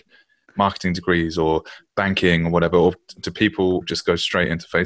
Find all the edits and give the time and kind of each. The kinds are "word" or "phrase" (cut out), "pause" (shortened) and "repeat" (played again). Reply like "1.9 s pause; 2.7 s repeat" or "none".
3.8 s word

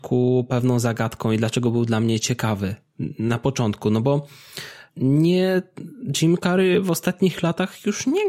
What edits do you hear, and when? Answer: 4.9 s pause

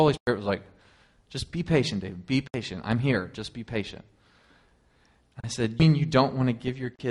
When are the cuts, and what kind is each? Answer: 5.8 s word

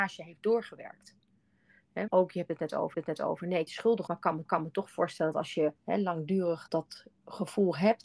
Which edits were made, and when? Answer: 2.1 s word; 2.9 s repeat; 3.7 s phrase; 4.1 s word; 4.5 s repeat; 5.8 s pause; 6.7 s word

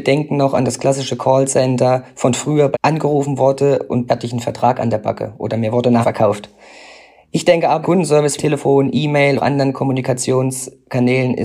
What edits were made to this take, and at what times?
2.7 s word; 4.1 s word; 6.0 s word; 7.8 s word; 8.4 s word; 9.4 s word

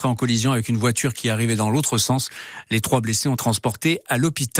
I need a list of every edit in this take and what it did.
3.4 s word

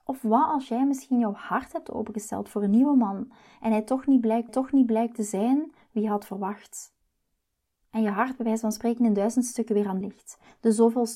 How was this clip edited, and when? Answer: 4.5 s repeat; 10.0 s word

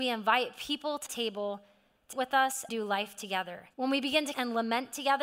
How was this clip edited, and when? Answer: 1.1 s word; 2.1 s word; 2.7 s word; 3.7 s pause; 4.3 s word

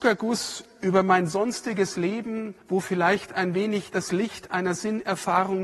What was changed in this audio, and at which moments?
2.6 s pause

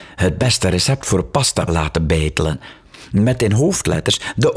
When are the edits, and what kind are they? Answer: 1.7 s word

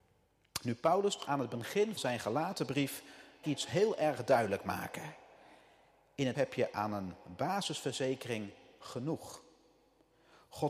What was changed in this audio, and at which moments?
1.3 s word; 2.0 s word; 3.4 s word; 6.3 s word

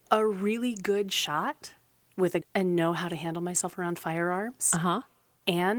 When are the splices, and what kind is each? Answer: 2.4 s word

